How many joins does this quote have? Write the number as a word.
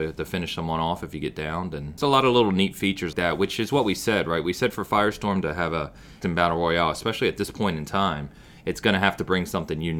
three